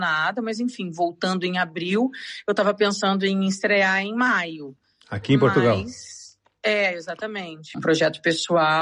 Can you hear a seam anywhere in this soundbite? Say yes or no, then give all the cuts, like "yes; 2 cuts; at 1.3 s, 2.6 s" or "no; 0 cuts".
yes; 1 cut; at 7.7 s